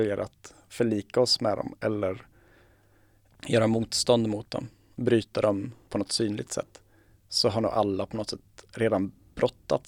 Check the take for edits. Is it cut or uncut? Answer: uncut